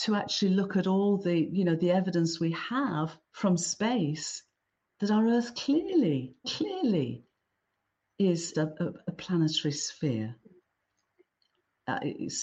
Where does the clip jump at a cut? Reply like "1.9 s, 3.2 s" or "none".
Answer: 3.2 s, 6.4 s, 8.5 s